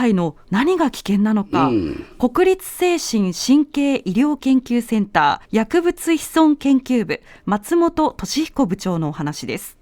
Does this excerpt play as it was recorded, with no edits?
no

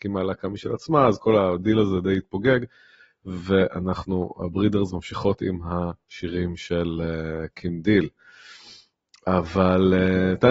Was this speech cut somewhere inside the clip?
no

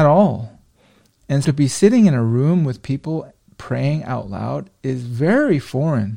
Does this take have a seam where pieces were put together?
yes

